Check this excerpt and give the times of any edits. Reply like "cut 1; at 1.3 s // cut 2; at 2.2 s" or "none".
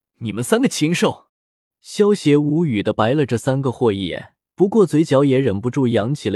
cut 1; at 1.3 s // cut 2; at 4.4 s